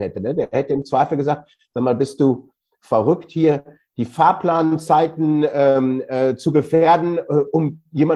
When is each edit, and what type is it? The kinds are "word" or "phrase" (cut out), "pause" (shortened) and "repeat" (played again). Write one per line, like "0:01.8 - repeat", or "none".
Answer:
none